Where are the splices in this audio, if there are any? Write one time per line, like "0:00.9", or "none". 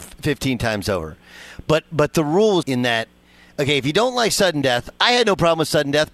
0:02.6